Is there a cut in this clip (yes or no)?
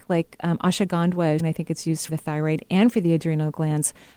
yes